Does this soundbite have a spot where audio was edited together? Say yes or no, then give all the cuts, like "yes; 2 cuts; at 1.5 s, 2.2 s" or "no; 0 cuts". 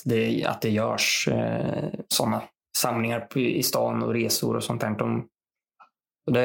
no; 0 cuts